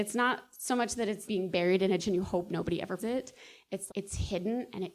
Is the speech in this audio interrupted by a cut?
yes; 4 cuts; at 1.3 s, 2.0 s, 3.0 s, 3.9 s

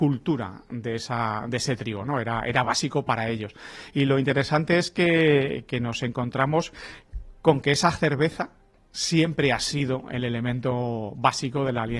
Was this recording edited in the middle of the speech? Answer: no; 0 cuts

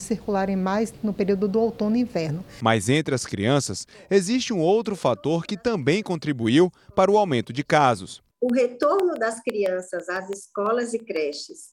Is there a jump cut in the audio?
no; 0 cuts

